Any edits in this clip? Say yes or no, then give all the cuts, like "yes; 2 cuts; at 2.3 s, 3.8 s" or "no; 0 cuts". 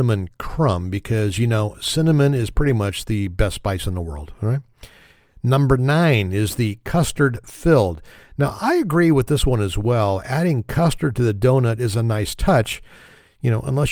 no; 0 cuts